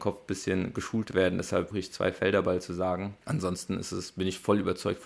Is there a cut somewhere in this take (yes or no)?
yes